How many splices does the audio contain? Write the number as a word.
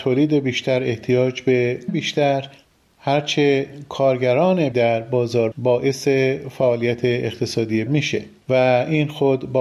four